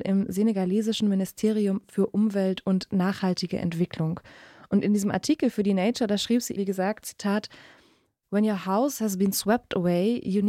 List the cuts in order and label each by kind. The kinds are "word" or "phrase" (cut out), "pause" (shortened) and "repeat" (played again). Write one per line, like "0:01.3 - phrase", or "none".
0:06.6 - word

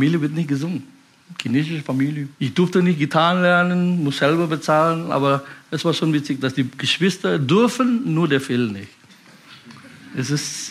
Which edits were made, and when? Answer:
0:02.3 - pause

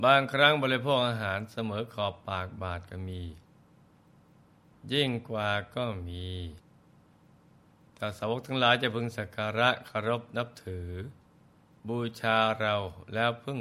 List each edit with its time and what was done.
none

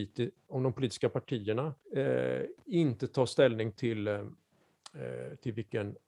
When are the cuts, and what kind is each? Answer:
0:01.8 - pause

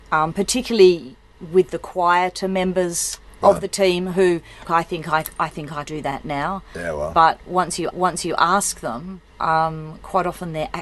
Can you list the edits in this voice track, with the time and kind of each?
0:04.6 - phrase
0:05.8 - word
0:07.9 - repeat
0:09.3 - pause

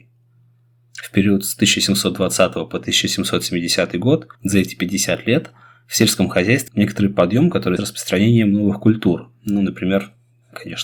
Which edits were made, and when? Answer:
0:04.3 - pause
0:06.7 - word
0:07.8 - phrase

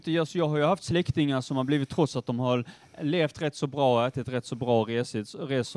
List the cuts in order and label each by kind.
none

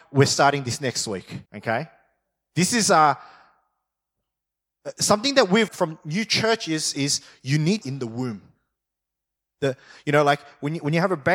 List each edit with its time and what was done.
0:01.5 - pause
0:05.7 - word
0:07.8 - phrase

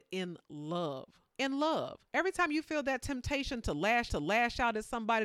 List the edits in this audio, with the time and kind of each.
0:01.3 - pause
0:02.1 - pause
0:04.1 - repeat

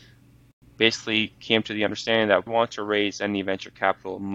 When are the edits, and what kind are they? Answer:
0:02.5 - word

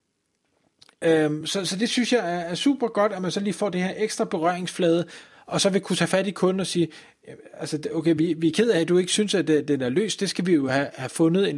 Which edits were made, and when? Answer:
none

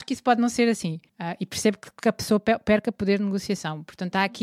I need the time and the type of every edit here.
0:01.1 - pause

